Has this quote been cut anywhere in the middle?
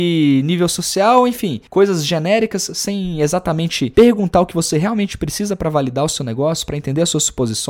yes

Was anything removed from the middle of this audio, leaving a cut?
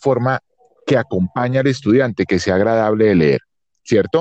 no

